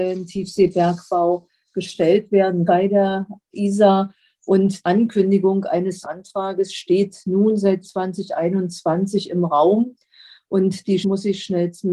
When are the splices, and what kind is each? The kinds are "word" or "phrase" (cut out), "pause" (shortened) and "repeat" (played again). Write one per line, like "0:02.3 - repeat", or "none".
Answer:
0:02.7 - word
0:04.8 - word
0:06.0 - word
0:07.8 - word
0:11.0 - word